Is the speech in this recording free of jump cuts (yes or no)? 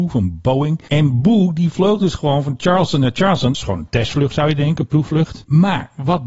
no